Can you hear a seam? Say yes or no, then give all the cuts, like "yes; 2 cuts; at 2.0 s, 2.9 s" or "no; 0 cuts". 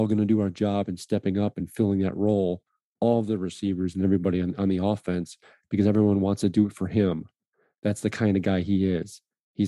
no; 0 cuts